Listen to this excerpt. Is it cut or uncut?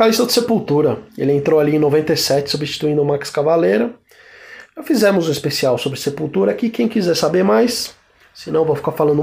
cut